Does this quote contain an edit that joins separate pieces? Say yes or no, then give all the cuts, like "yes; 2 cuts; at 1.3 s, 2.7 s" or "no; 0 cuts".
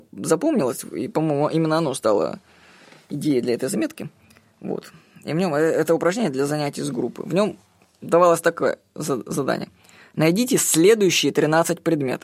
no; 0 cuts